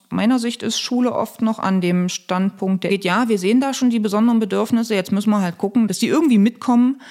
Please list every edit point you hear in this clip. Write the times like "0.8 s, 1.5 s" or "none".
2.9 s